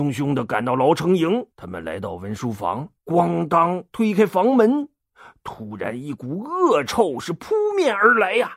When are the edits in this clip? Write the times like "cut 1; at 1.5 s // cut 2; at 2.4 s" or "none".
cut 1; at 1.5 s // cut 2; at 3.0 s